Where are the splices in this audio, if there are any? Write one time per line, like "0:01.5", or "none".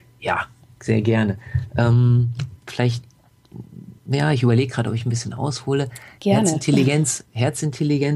0:04.0